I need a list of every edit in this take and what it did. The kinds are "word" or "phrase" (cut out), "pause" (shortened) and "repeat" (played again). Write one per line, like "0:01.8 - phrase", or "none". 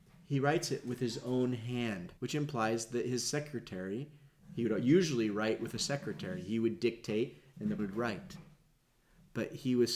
0:02.2 - pause
0:07.8 - word